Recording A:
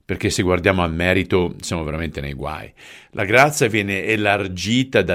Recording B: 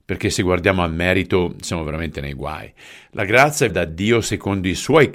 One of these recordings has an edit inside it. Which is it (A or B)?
B